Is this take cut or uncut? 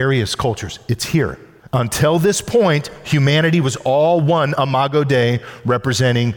cut